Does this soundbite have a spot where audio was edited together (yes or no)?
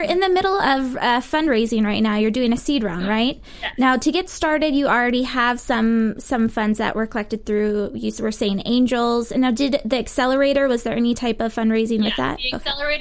no